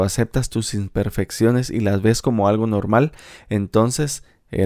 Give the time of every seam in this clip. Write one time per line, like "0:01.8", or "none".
none